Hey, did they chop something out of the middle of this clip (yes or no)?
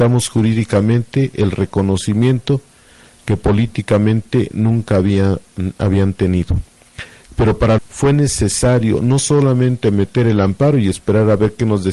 yes